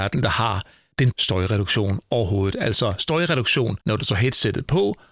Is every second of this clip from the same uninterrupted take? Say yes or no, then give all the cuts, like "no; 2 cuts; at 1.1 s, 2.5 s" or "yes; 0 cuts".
no; 2 cuts; at 1.1 s, 3.8 s